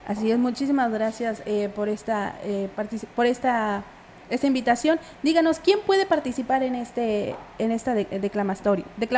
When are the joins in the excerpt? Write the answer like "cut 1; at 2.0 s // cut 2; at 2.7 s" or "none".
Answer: none